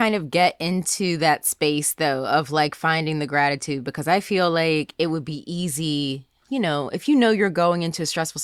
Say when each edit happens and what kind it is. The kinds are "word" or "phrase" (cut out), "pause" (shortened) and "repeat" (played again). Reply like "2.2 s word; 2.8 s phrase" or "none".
none